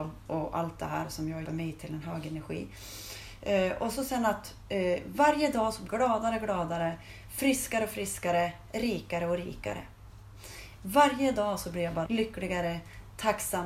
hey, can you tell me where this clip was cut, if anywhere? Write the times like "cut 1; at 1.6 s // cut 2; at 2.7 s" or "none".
cut 1; at 1.4 s // cut 2; at 5.9 s // cut 3; at 12.1 s